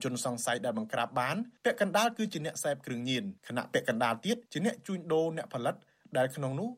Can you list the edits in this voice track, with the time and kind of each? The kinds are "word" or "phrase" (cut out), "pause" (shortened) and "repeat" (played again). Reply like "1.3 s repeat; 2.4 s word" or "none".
1.6 s pause; 3.4 s pause; 4.5 s pause